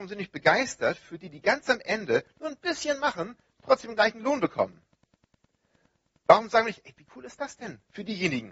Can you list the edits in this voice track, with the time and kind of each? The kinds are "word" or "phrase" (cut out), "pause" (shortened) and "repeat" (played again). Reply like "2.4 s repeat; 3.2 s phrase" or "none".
none